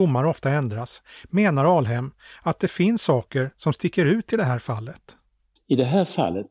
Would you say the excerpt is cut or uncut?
uncut